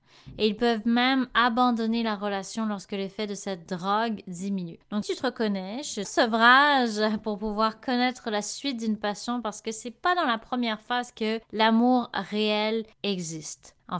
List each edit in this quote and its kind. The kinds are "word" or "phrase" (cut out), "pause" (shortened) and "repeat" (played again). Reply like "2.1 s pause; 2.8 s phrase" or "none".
5.0 s word; 6.0 s phrase